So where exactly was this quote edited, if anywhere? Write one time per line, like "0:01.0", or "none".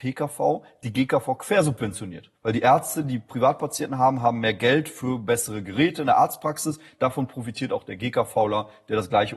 0:02.4

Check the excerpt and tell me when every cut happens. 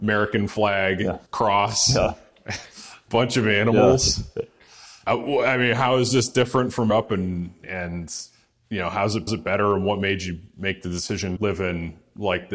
0:01.3
0:06.9
0:09.3
0:11.4

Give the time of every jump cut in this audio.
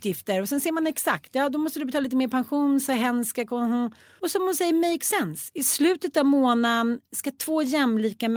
none

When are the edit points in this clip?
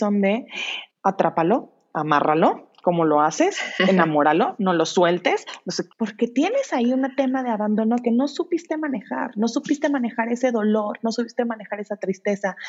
0:00.9
0:05.9

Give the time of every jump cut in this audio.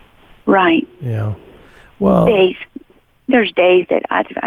none

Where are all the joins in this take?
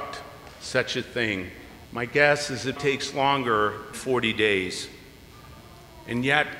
0:01.8
0:02.8
0:03.9

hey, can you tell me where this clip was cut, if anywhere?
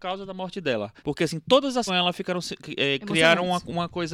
0:01.0
0:01.9

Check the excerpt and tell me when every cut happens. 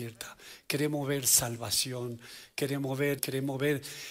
0:03.2

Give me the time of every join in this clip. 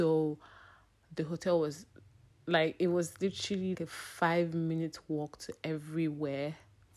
0:03.7

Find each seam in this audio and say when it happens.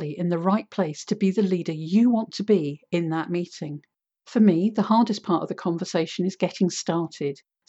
none

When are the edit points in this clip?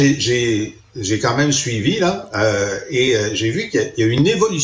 none

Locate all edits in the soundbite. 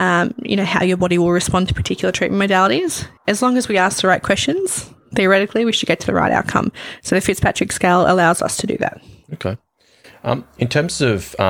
0:03.2

